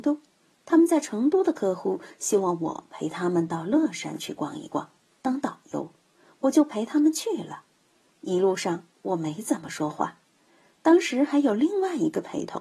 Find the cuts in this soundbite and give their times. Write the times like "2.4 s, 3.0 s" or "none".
none